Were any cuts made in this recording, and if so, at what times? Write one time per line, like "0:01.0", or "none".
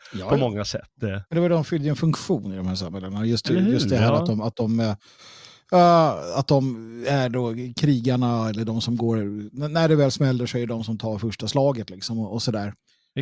0:01.3